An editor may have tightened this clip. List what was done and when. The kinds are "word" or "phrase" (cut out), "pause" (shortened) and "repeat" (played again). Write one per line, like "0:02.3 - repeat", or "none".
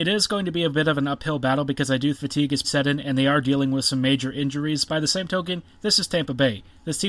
0:02.1 - word
0:02.6 - word
0:04.9 - word